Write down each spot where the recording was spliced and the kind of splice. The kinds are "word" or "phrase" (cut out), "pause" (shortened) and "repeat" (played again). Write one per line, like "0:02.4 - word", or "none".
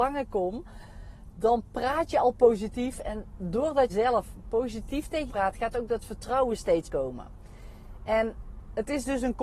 0:03.9 - word
0:05.3 - word
0:06.8 - word